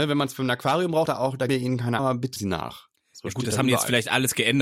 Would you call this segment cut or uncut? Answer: cut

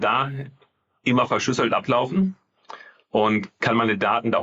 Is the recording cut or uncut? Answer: uncut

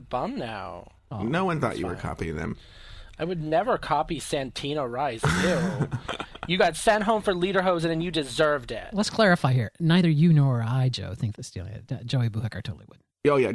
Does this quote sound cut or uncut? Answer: cut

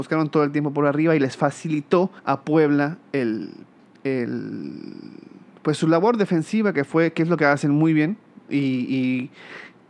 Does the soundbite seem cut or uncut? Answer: cut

